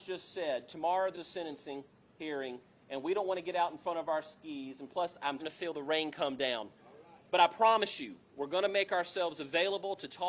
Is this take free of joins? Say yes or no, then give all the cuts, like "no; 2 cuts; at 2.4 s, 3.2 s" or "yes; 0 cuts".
no; 2 cuts; at 1.1 s, 5.4 s